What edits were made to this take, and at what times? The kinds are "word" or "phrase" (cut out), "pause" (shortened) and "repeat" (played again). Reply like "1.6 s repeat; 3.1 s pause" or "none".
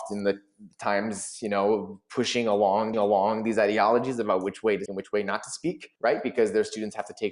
2.9 s repeat; 4.9 s word; 6.0 s pause